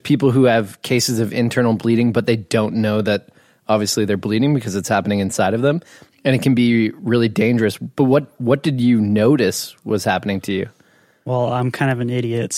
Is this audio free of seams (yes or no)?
yes